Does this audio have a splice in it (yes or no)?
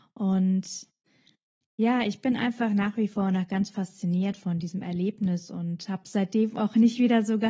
no